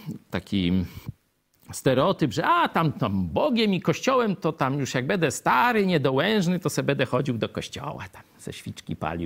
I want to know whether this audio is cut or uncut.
uncut